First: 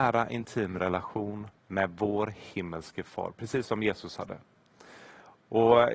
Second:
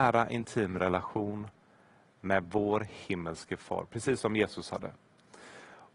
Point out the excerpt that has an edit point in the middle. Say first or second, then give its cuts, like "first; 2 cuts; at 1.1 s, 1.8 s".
first; 1 cut; at 1.6 s